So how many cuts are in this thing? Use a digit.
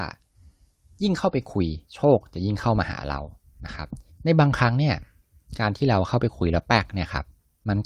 2